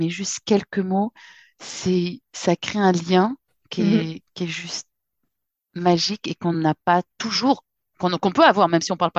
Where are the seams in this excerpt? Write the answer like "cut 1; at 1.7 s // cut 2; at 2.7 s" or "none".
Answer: none